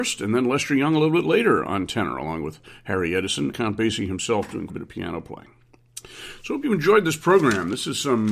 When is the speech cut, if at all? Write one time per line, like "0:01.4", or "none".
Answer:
0:03.5
0:04.7